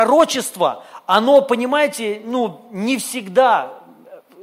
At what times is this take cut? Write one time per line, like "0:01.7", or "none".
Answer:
none